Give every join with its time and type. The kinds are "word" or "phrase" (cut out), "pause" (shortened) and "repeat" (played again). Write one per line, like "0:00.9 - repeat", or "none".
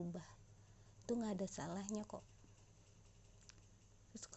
0:01.0 - word